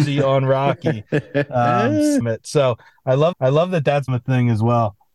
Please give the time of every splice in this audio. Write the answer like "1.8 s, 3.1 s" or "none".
2.2 s, 3.3 s, 4.1 s